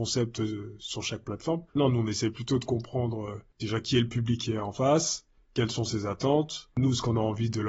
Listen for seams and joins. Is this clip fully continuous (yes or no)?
no